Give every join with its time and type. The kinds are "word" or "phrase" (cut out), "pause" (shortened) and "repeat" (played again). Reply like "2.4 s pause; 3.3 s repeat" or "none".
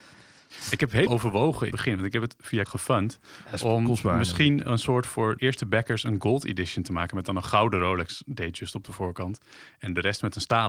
1.1 s word; 1.7 s word; 2.7 s phrase; 5.4 s word